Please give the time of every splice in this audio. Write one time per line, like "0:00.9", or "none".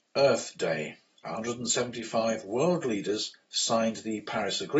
0:01.2